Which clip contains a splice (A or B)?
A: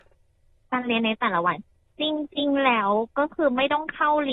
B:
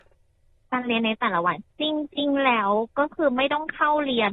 B